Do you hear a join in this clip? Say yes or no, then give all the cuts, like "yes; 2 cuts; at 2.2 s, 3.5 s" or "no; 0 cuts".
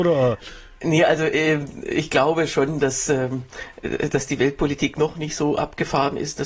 no; 0 cuts